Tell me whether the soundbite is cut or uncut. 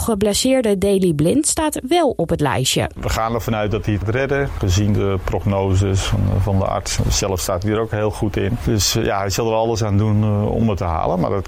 cut